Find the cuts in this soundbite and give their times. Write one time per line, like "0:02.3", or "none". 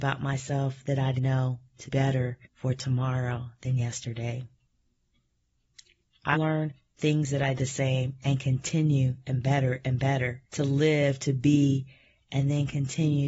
0:01.2
0:01.9
0:02.4
0:06.3
0:07.5
0:09.2
0:10.5